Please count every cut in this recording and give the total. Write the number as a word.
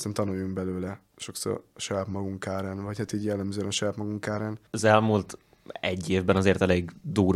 two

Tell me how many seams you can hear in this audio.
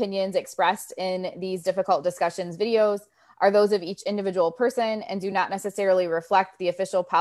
zero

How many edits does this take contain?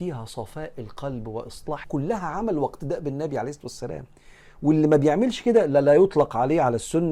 one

